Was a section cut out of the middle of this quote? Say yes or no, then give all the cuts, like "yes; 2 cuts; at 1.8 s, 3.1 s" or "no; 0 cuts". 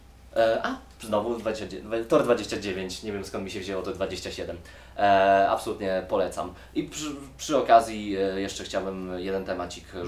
no; 0 cuts